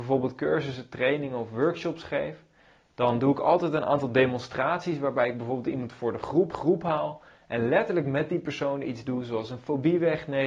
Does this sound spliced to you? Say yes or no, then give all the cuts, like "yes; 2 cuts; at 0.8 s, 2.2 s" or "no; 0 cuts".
yes; 1 cut; at 6.5 s